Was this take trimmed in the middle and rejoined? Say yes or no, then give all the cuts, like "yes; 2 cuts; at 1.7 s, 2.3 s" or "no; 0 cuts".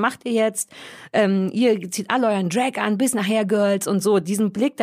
no; 0 cuts